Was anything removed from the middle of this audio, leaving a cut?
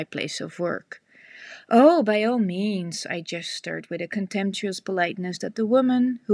no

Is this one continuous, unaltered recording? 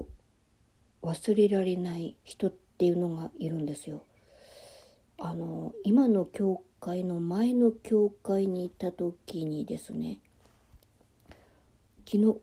no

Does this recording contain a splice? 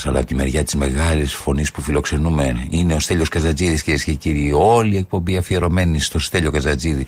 no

